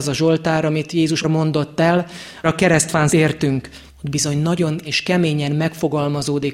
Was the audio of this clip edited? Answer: yes; 5 cuts; at 1.2 s, 2.4 s, 3.1 s, 3.9 s, 4.8 s

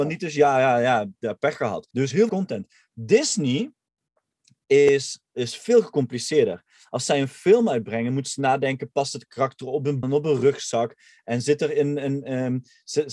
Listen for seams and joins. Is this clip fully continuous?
no; 3 cuts; at 1.9 s, 2.3 s, 10.0 s

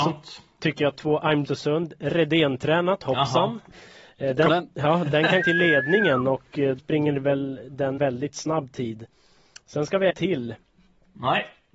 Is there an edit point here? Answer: yes; 7 cuts; at 0.9 s, 1.4 s, 4.5 s, 5.4 s, 6.8 s, 8.0 s, 10.1 s

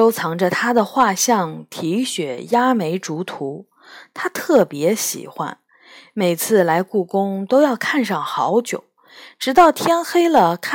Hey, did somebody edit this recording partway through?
no; 0 cuts

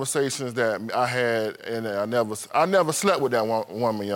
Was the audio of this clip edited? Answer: no; 0 cuts

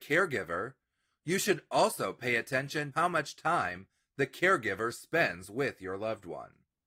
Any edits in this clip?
yes; 1 cut; at 2.9 s

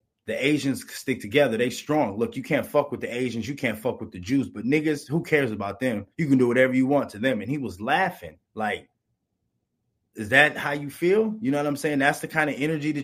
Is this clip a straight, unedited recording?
no; 2 cuts; at 6.1 s, 8.4 s

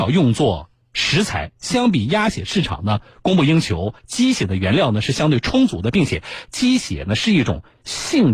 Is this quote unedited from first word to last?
yes; 0 cuts

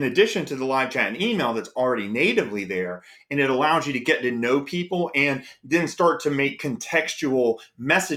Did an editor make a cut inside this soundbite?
no; 0 cuts

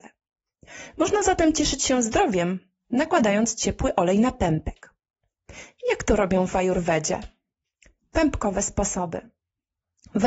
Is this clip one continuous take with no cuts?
yes; 0 cuts

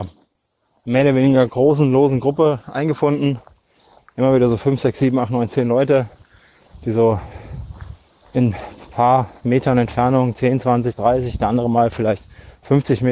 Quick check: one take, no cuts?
yes; 0 cuts

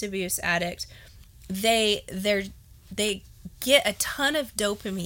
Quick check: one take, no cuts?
yes; 0 cuts

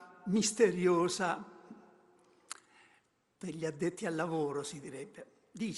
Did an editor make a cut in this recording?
no; 0 cuts

